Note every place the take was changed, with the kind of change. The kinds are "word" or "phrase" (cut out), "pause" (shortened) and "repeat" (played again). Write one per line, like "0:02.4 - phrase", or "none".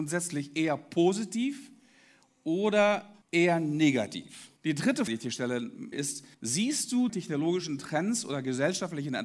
0:03.2 - pause
0:04.6 - pause
0:05.1 - word
0:05.9 - word
0:06.3 - pause
0:07.1 - phrase